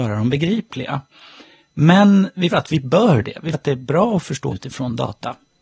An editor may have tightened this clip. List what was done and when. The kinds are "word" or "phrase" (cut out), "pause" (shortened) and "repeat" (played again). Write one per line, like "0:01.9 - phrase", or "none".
0:02.5 - word
0:03.5 - word
0:04.5 - word